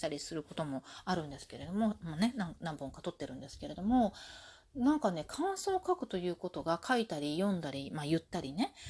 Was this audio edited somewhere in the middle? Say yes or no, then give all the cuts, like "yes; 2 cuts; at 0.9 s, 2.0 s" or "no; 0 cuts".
no; 0 cuts